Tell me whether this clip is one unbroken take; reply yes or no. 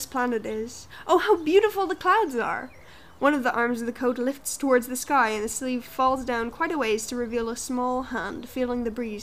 yes